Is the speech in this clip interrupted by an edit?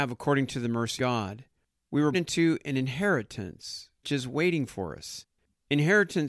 yes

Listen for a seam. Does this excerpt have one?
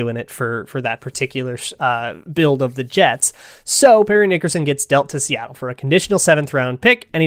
no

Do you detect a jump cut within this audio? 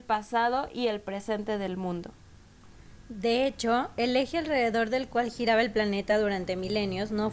no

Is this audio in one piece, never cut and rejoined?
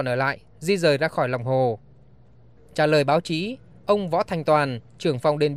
yes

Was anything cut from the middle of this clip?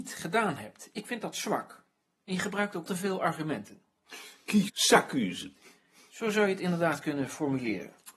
yes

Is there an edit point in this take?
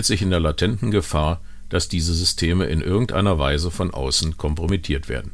no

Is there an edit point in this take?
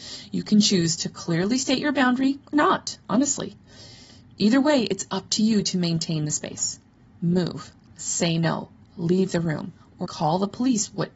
yes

